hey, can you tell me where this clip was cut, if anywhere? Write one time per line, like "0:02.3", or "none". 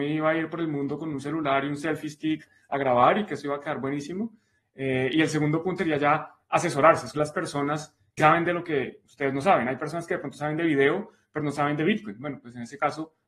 0:05.8
0:07.1
0:08.2